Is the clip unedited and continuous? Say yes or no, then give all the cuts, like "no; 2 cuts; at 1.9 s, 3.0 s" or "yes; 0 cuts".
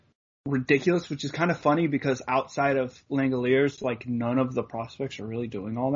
yes; 0 cuts